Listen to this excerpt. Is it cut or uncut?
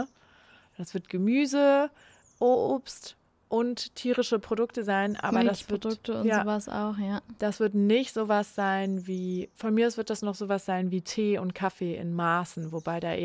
uncut